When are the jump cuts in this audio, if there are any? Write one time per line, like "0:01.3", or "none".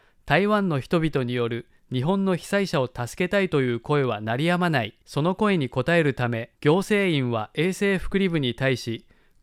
0:05.0
0:06.6